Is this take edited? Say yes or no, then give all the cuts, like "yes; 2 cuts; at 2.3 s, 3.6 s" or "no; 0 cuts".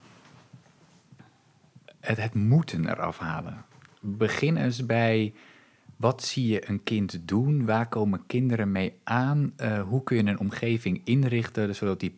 no; 0 cuts